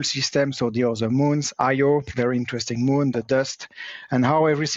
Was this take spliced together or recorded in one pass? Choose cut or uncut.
uncut